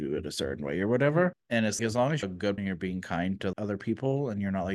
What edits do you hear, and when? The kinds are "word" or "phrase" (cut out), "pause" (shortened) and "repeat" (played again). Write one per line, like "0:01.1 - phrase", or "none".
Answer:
0:01.3 - word
0:01.8 - word
0:02.2 - word
0:02.6 - word
0:03.5 - word